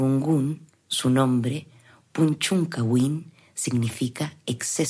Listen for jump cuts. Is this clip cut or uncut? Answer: uncut